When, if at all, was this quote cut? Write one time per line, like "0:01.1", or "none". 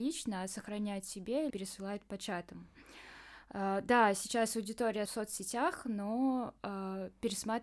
0:01.5
0:05.1